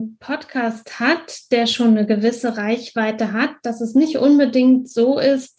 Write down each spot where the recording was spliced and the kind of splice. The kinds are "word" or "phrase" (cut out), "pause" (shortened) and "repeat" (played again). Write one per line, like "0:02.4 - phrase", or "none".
none